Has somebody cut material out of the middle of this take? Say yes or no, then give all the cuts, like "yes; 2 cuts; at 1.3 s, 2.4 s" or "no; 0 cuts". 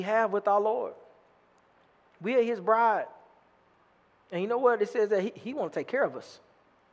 no; 0 cuts